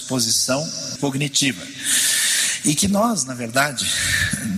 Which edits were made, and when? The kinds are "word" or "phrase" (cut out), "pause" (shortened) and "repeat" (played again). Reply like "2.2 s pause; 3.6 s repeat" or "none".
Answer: 1.0 s phrase